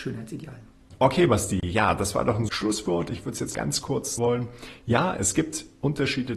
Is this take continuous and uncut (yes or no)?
no